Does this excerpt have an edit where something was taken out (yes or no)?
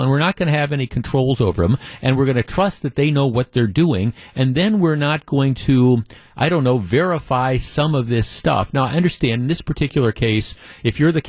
no